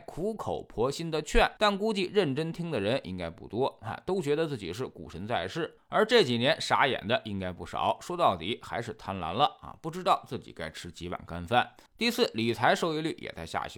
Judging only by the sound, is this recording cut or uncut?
cut